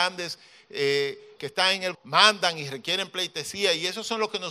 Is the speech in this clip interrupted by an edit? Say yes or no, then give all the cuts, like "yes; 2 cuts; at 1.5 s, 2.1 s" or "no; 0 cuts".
yes; 2 cuts; at 1.4 s, 1.9 s